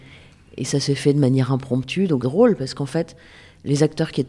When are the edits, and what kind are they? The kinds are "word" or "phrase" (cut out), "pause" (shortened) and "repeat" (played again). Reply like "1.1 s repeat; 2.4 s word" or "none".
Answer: 2.2 s word